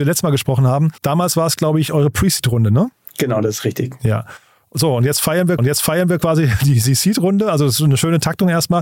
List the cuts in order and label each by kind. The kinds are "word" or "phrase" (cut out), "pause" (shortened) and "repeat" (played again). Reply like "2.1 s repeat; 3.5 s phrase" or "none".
1.0 s pause; 5.6 s repeat